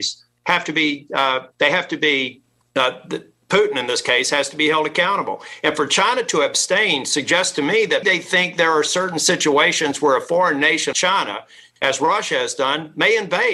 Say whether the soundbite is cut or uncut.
cut